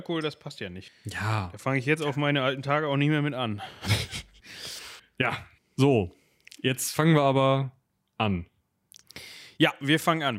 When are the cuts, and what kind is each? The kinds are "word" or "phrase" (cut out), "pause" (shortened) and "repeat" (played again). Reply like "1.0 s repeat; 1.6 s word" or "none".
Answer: none